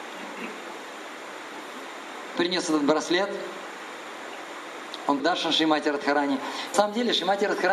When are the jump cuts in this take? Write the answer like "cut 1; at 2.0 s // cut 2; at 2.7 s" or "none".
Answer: cut 1; at 2.4 s // cut 2; at 5.2 s // cut 3; at 6.7 s